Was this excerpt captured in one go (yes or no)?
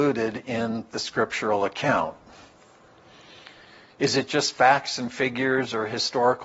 yes